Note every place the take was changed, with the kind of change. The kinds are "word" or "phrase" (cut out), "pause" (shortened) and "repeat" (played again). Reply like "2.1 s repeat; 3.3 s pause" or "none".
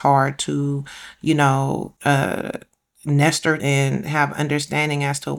2.0 s pause; 3.6 s word